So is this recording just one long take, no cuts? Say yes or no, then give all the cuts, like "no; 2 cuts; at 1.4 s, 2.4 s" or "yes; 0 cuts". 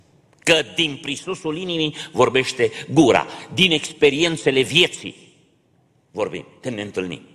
yes; 0 cuts